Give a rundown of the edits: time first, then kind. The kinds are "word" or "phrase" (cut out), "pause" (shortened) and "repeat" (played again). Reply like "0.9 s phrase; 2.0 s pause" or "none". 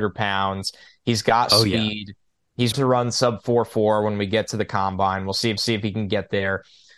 2.7 s word; 5.6 s repeat